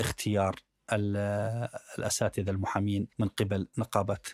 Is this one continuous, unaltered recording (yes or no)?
no